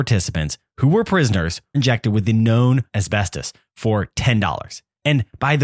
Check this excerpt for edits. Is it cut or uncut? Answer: cut